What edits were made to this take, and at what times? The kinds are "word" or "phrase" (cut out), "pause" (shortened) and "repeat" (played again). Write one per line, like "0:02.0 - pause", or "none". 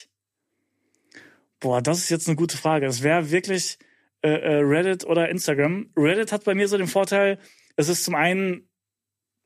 none